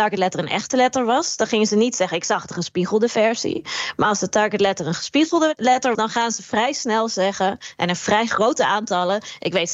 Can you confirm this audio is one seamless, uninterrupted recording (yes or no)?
no